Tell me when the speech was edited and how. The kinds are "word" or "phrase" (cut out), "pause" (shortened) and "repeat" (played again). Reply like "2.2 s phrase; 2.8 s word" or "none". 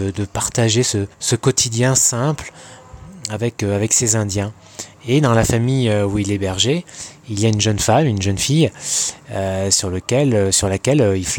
1.1 s pause